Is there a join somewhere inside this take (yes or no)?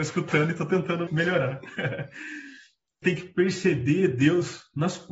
yes